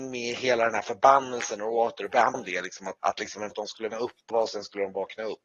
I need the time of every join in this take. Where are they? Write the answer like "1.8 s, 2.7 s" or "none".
2.3 s, 3.0 s, 3.5 s, 3.9 s, 4.3 s